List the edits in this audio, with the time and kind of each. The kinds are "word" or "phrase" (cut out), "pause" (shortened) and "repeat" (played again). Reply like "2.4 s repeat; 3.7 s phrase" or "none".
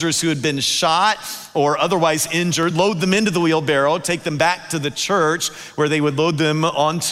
none